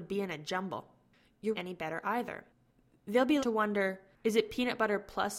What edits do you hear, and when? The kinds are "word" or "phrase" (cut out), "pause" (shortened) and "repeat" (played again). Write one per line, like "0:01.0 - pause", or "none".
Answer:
0:01.5 - phrase
0:03.4 - word